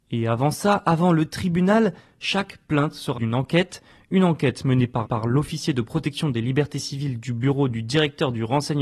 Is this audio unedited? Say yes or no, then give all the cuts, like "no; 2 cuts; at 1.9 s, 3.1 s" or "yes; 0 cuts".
no; 2 cuts; at 3.2 s, 5.0 s